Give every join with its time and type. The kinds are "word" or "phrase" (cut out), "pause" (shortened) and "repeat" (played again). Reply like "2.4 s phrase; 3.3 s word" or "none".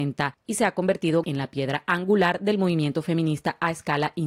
1.2 s word